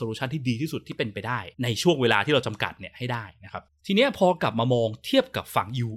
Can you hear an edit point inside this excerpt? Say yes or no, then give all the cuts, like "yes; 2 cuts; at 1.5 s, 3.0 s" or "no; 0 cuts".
yes; 2 cuts; at 1.5 s, 3.7 s